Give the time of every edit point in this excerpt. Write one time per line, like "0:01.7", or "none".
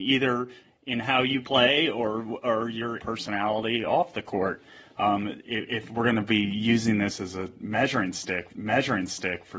0:08.5